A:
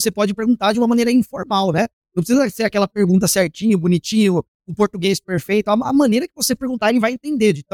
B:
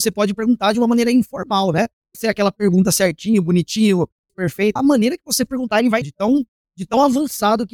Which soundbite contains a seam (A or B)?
B